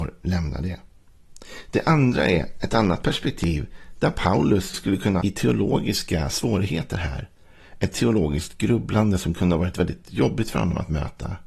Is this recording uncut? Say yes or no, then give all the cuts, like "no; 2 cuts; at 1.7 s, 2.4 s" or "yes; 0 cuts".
no; 2 cuts; at 4.7 s, 5.2 s